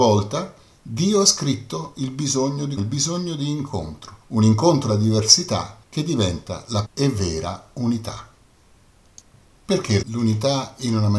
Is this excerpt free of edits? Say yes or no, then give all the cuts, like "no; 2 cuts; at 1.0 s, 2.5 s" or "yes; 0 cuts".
no; 6 cuts; at 2.8 s, 4.2 s, 4.9 s, 5.8 s, 6.8 s, 10.0 s